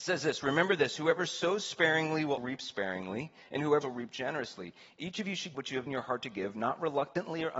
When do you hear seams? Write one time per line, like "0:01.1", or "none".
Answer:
0:02.4
0:03.8
0:05.5
0:05.9